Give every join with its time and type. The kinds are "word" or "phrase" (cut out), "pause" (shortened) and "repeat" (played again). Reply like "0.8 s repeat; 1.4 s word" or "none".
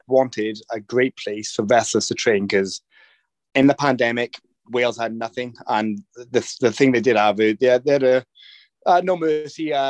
none